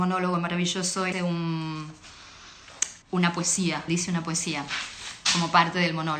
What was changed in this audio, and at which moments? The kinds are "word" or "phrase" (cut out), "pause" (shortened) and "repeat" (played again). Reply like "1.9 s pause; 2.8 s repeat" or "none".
1.1 s word; 3.0 s pause; 3.9 s word